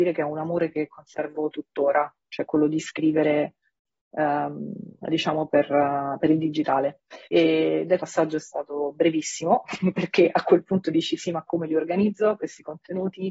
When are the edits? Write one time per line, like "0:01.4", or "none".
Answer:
0:07.2
0:08.0